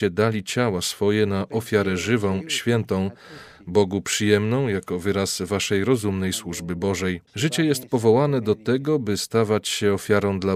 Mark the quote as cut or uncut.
cut